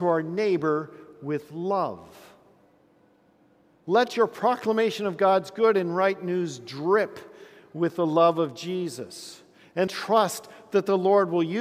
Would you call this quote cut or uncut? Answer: cut